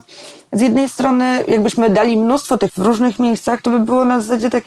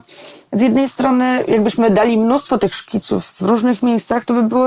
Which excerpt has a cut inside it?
first; 1 cut; at 2.7 s

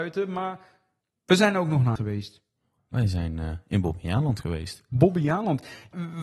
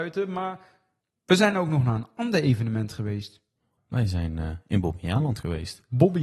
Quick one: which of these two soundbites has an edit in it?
first; 1 cut; at 2.0 s

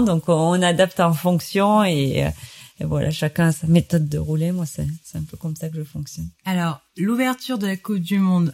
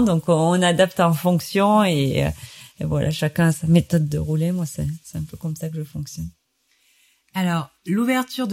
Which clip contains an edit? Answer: first; 1 cut; at 6.4 s

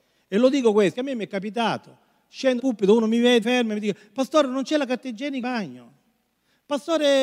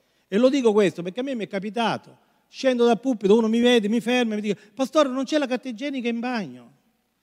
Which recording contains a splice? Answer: first; 4 cuts; at 0.9 s, 2.6 s, 3.4 s, 5.4 s

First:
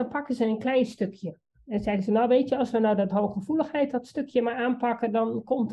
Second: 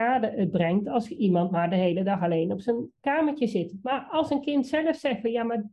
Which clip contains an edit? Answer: second; 1 cut; at 3.0 s

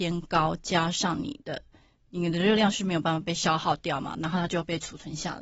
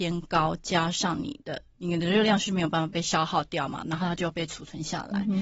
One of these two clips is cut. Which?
second; 1 cut; at 1.7 s

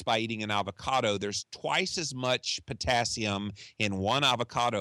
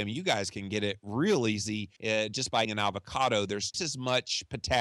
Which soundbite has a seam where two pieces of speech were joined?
second; 3 cuts; at 2.0 s, 2.6 s, 3.7 s

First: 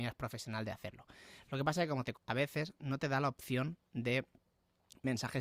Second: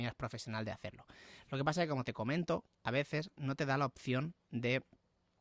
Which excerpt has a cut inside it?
first; 1 cut; at 2.1 s

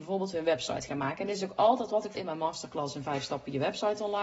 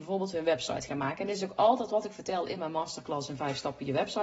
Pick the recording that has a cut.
first; 1 cut; at 2.1 s

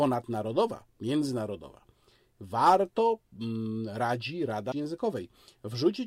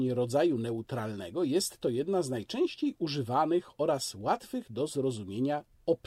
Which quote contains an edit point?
first; 1 cut; at 4.7 s

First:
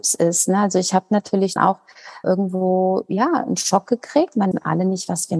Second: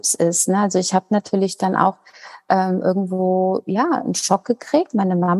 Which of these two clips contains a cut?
first; 3 cuts; at 1.6 s, 2.2 s, 4.5 s

